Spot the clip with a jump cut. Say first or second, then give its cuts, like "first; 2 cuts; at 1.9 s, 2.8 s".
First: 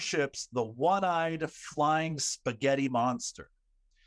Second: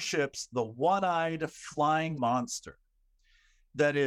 second; 1 cut; at 2.2 s